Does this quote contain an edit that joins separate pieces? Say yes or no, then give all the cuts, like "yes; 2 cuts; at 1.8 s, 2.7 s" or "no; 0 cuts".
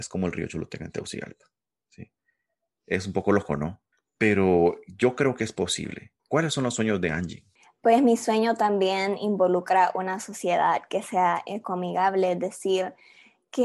yes; 2 cuts; at 3.9 s, 6.2 s